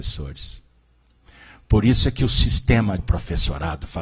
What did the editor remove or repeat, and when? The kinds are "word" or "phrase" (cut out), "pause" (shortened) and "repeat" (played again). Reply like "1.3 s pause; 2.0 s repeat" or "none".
3.0 s word